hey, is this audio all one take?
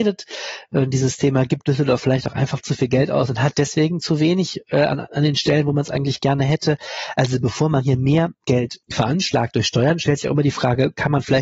no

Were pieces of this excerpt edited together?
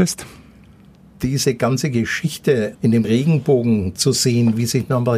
yes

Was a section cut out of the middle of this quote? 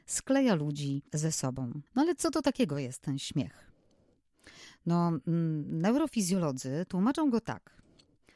yes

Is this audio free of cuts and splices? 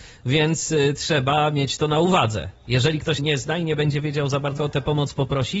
no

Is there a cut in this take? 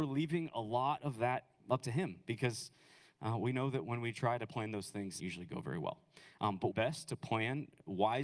yes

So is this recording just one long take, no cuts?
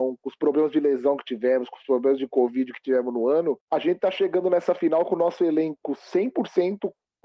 no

